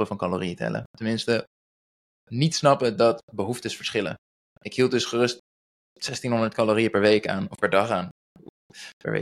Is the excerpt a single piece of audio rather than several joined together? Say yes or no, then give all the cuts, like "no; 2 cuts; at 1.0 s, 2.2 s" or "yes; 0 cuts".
yes; 0 cuts